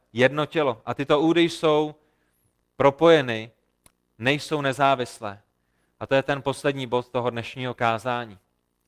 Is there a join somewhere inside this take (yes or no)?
no